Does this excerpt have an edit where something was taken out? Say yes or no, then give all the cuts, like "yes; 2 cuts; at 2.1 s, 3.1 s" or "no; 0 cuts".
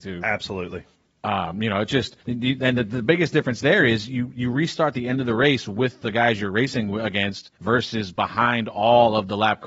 yes; 2 cuts; at 2.2 s, 7.5 s